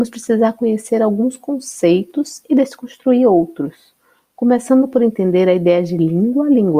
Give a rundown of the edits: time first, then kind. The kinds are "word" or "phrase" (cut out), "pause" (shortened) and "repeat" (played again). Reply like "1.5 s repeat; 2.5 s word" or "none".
none